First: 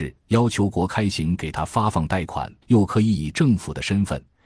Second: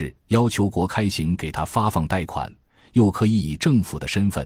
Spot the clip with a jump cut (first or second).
first